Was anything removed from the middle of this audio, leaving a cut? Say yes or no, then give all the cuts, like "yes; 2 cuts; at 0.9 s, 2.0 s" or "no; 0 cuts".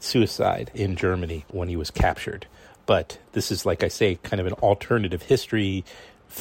no; 0 cuts